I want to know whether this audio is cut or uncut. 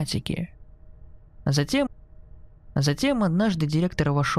cut